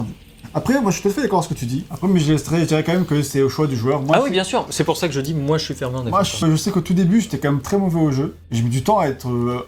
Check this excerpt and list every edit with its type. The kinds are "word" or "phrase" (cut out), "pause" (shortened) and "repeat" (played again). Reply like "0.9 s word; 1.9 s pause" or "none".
6.4 s word; 8.4 s pause